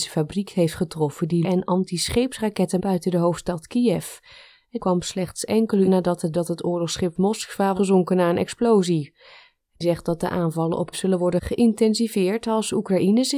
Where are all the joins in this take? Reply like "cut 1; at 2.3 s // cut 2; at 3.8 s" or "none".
cut 1; at 1.4 s // cut 2; at 2.8 s // cut 3; at 4.8 s // cut 4; at 5.9 s // cut 5; at 6.3 s // cut 6; at 7.8 s // cut 7; at 9.8 s // cut 8; at 10.9 s